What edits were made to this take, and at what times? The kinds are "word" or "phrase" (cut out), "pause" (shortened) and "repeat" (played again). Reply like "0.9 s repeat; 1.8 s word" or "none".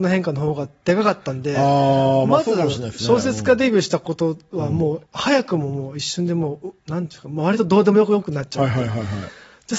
5.1 s pause; 6.8 s pause

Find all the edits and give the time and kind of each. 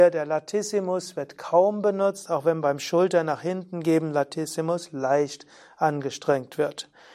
none

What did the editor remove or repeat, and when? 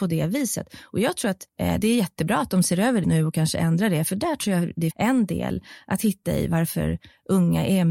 1.5 s pause; 3.0 s word; 4.9 s word

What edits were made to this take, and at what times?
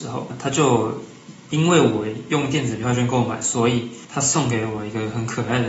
4.0 s pause

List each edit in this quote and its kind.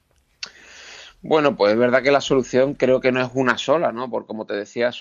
none

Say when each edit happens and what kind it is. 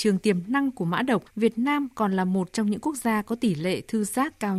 1.3 s pause

